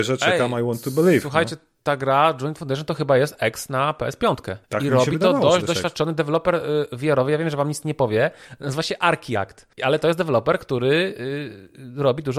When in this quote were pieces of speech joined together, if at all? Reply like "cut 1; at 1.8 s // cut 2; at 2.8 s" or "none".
cut 1; at 4.6 s // cut 2; at 9.7 s